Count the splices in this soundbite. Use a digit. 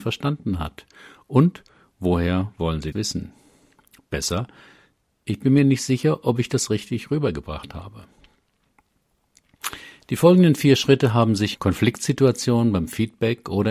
2